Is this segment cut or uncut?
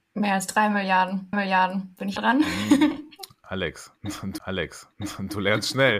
cut